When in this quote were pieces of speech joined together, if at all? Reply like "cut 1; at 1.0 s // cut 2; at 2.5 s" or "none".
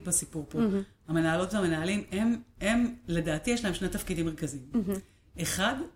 none